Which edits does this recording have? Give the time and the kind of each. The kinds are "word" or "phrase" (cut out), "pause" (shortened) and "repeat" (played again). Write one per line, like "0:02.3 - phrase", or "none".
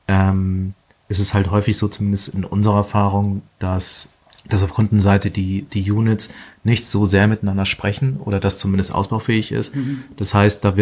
none